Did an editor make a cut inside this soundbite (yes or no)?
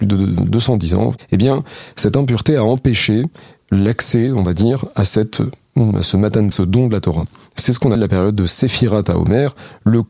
yes